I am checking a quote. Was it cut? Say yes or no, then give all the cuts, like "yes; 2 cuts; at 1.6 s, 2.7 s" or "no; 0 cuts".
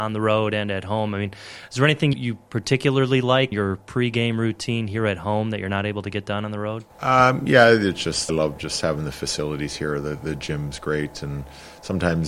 yes; 4 cuts; at 2.1 s, 3.5 s, 6.9 s, 8.3 s